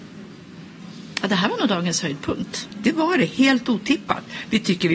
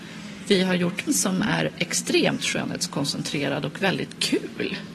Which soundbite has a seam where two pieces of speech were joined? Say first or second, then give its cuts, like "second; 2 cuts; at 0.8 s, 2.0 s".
second; 1 cut; at 1.1 s